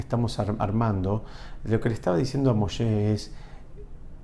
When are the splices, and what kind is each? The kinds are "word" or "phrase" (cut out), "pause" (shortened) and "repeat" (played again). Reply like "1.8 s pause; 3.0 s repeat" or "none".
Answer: none